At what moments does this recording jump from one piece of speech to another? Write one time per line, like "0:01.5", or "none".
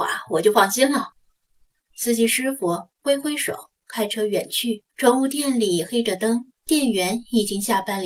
0:01.1
0:04.9
0:06.6